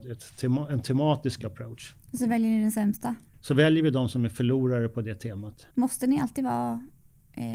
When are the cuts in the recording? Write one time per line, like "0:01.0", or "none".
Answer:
0:03.3
0:05.7